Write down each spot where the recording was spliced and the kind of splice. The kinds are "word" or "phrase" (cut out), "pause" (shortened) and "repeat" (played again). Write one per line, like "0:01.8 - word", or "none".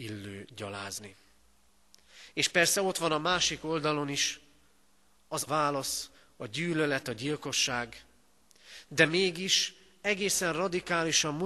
0:05.5 - word